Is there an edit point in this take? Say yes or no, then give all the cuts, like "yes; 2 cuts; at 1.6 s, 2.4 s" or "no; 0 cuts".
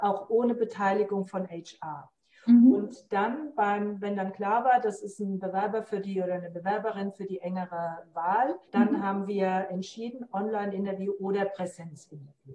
yes; 1 cut; at 8.6 s